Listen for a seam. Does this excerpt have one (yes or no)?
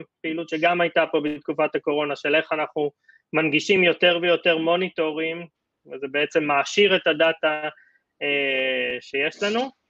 no